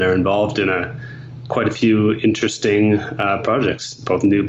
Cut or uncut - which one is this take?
uncut